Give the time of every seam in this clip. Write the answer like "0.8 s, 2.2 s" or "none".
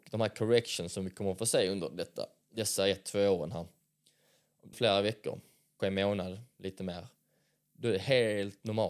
4.7 s, 5.8 s